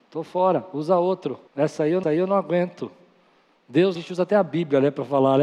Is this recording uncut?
no; 3 cuts; at 1.5 s, 2.0 s, 3.9 s

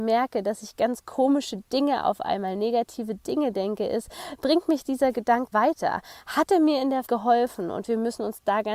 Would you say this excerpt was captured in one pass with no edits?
no; 2 cuts; at 5.5 s, 7.0 s

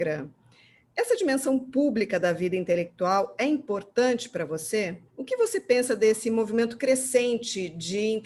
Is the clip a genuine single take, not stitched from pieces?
no; 1 cut; at 5.1 s

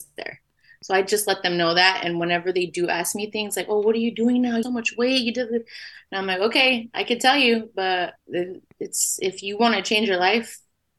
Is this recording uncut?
no; 2 cuts; at 4.6 s, 8.2 s

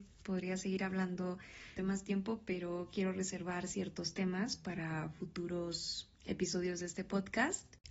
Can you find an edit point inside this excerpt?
yes; 2 cuts; at 1.8 s, 6.1 s

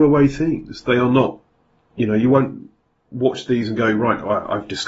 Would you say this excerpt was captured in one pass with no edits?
yes; 0 cuts

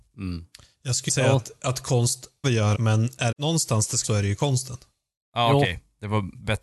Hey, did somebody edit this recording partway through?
yes; 5 cuts; at 1.1 s, 2.4 s, 2.7 s, 3.3 s, 4.0 s

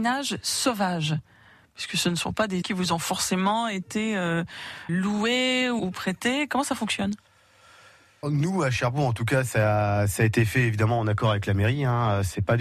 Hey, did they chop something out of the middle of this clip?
yes; 4 cuts; at 2.6 s, 4.9 s, 5.8 s, 8.2 s

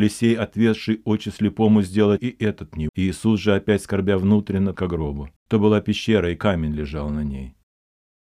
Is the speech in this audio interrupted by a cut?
yes; 4 cuts; at 2.2 s, 2.9 s, 4.8 s, 5.4 s

